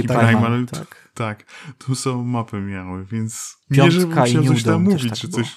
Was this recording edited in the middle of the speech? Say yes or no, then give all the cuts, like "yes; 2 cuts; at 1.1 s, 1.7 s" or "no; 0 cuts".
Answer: yes; 1 cut; at 3.6 s